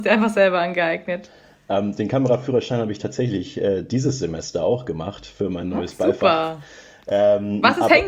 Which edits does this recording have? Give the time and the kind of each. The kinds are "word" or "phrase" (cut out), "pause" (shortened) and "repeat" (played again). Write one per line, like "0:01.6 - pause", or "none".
none